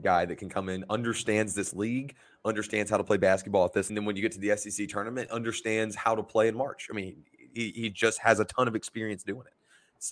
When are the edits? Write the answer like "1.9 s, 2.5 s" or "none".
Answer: 3.9 s